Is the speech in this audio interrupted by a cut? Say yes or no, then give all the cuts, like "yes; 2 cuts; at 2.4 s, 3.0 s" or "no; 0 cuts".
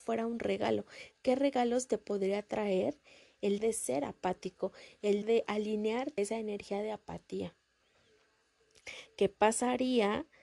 yes; 3 cuts; at 3.6 s, 5.2 s, 6.2 s